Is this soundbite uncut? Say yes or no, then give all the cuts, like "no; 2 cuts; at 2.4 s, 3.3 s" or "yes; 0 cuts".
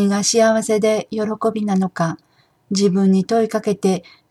yes; 0 cuts